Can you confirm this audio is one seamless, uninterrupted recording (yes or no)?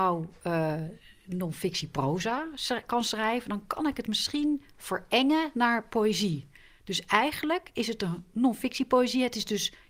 yes